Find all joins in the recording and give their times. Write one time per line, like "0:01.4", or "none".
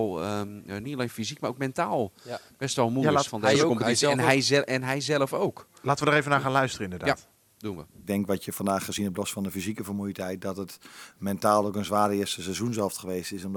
none

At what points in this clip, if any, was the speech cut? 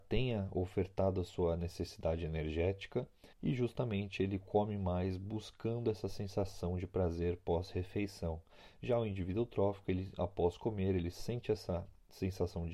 0:03.3

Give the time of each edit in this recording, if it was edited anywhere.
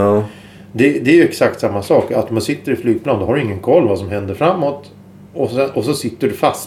none

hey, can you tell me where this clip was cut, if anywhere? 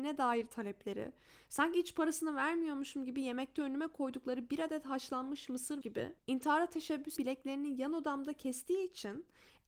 0:05.8
0:06.2
0:07.2

